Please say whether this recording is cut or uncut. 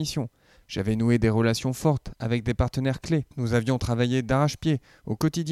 cut